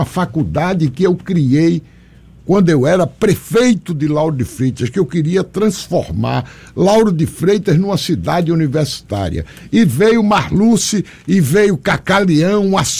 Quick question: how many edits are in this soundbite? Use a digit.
0